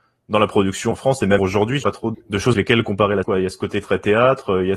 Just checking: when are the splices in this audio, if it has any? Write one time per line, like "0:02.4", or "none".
0:00.9
0:01.4
0:01.8
0:02.1
0:02.5
0:03.2